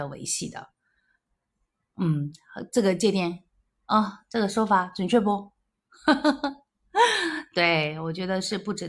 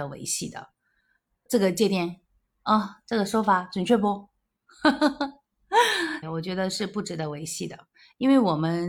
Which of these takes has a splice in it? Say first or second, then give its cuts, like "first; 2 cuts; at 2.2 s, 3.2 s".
second; 2 cuts; at 1.5 s, 6.2 s